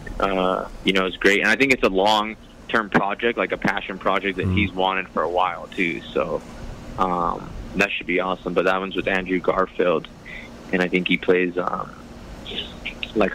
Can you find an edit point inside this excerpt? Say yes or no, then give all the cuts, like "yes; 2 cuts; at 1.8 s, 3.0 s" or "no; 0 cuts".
no; 0 cuts